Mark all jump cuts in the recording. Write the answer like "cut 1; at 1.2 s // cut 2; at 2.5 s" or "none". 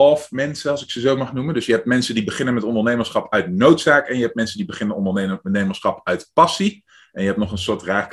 none